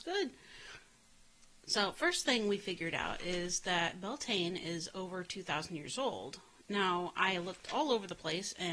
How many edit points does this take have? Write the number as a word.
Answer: zero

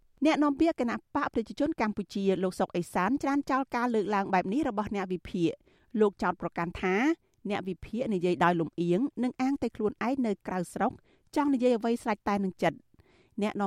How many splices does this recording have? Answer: zero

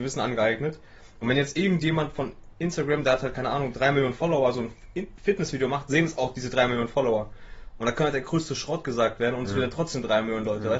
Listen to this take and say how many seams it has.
zero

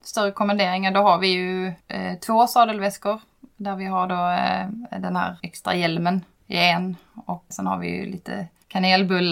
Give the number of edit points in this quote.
three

